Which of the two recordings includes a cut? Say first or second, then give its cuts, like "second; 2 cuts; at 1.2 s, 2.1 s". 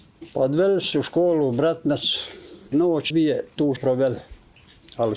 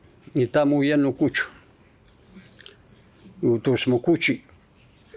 first; 4 cuts; at 0.9 s, 2.7 s, 3.1 s, 3.8 s